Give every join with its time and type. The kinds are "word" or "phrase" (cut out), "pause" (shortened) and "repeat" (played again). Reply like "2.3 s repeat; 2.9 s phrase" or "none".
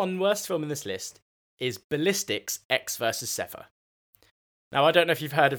none